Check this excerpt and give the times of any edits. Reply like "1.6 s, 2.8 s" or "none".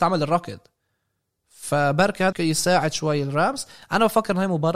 2.3 s